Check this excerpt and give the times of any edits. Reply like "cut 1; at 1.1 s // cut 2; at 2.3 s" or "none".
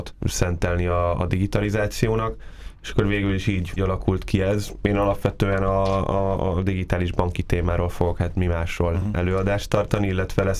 cut 1; at 3.8 s